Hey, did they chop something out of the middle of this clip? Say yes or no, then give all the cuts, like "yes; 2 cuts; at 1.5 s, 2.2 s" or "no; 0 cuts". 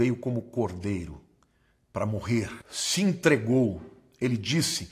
yes; 1 cut; at 2.6 s